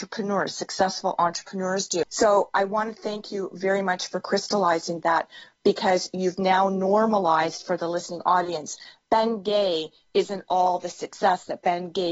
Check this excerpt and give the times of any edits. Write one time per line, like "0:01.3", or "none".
none